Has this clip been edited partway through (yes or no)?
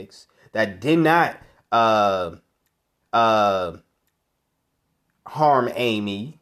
yes